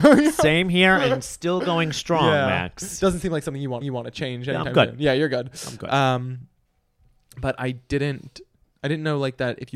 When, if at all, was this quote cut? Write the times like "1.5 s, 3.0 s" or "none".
3.8 s, 8.6 s